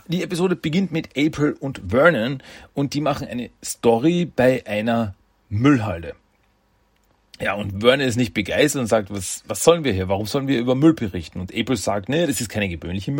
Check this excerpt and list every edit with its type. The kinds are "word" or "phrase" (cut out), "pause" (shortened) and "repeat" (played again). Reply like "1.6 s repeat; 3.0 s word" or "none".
none